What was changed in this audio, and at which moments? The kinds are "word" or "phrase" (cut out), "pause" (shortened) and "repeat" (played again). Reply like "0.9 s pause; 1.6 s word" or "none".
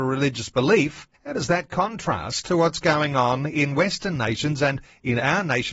1.1 s pause